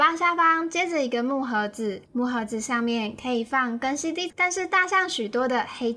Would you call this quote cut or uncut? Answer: cut